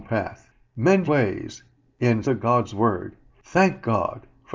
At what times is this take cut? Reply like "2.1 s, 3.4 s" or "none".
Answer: 1.1 s, 2.2 s

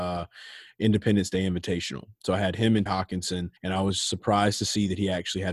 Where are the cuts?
2.9 s, 3.6 s

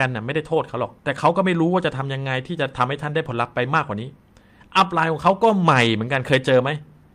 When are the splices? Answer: 1.0 s

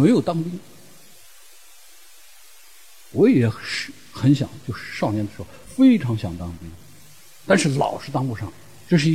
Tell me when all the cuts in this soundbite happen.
none

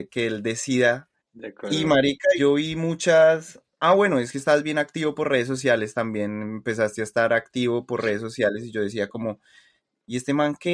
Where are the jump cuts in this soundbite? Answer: 1.2 s, 2.4 s, 3.7 s

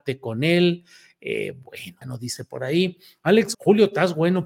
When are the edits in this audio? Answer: 2.0 s, 3.5 s

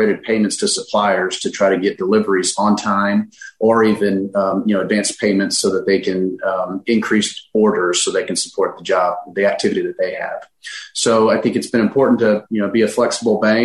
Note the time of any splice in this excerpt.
none

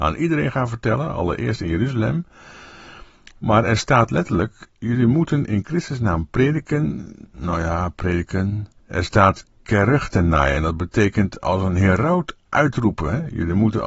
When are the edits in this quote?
8.8 s

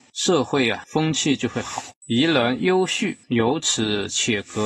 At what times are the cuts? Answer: 2.0 s, 3.2 s

